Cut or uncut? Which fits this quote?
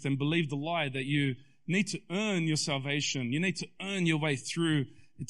uncut